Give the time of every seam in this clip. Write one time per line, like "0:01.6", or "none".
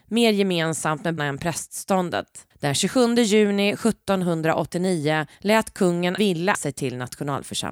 0:01.2
0:02.5
0:05.3
0:06.2
0:06.5